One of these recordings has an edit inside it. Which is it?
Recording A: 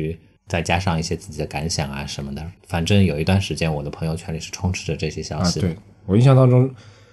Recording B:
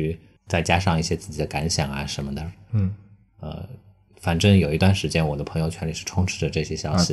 A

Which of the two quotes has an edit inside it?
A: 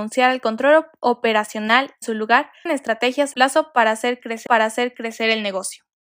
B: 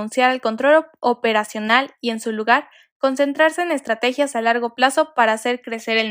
A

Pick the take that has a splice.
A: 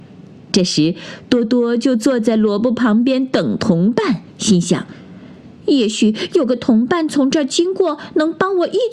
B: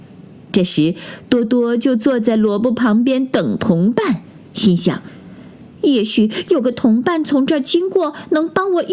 A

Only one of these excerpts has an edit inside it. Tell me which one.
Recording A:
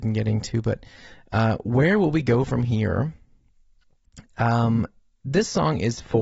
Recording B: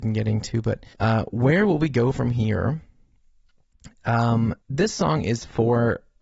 B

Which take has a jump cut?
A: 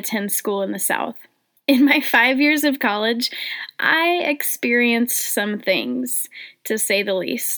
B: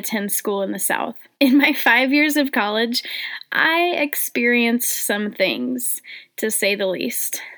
B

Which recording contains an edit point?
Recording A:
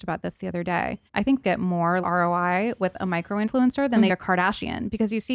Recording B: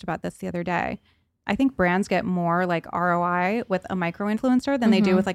A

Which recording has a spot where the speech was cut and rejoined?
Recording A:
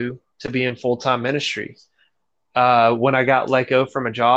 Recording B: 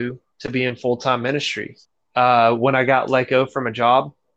B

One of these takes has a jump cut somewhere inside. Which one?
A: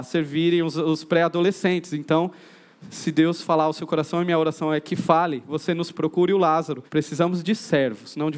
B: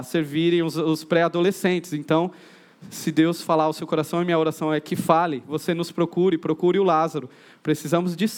A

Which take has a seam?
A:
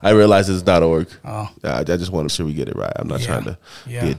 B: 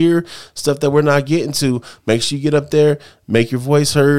A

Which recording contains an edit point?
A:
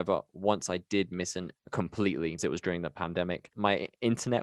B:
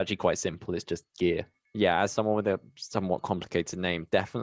A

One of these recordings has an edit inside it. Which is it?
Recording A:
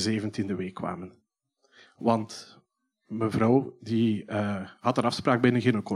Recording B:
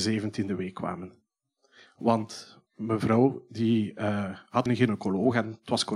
B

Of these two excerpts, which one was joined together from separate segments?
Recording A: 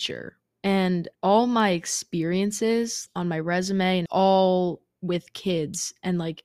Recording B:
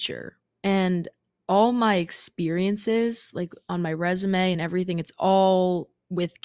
A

